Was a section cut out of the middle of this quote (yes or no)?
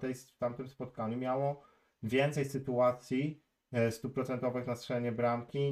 no